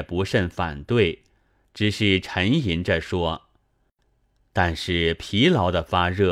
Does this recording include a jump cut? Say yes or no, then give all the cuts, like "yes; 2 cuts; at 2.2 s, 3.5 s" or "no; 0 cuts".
no; 0 cuts